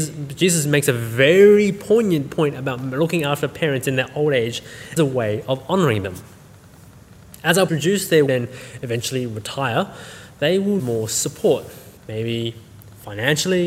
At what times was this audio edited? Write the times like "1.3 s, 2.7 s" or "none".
5.0 s, 7.7 s, 8.3 s, 10.8 s, 12.0 s